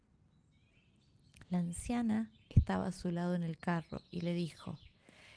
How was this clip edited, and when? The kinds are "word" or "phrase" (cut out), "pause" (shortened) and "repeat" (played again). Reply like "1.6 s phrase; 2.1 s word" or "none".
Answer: none

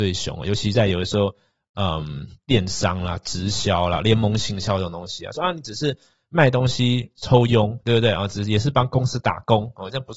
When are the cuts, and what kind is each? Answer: none

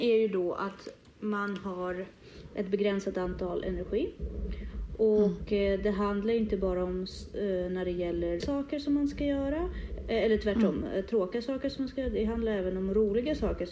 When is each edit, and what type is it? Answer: 8.4 s word

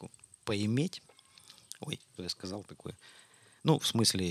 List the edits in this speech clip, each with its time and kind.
2.2 s word

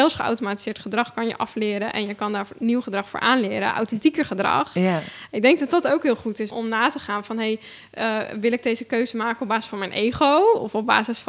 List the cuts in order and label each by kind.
6.5 s word

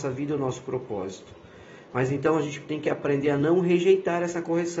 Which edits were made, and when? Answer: none

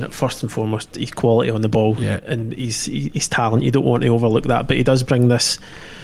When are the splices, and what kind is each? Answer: none

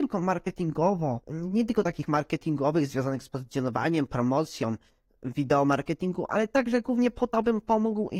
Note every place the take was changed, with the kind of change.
1.2 s pause

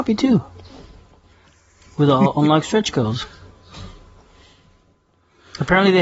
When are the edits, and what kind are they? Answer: none

